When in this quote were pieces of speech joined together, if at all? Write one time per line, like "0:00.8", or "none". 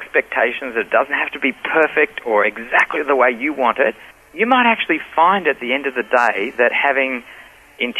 0:04.1